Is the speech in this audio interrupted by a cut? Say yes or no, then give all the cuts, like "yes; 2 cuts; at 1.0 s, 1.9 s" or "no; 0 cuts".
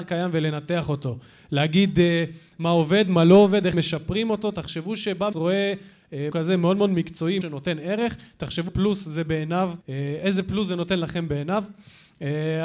yes; 6 cuts; at 3.7 s, 5.3 s, 6.3 s, 7.4 s, 8.7 s, 9.8 s